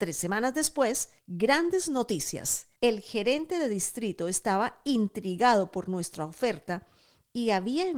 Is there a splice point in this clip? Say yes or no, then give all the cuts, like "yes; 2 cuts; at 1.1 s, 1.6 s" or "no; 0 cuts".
yes; 2 cuts; at 1.2 s, 2.8 s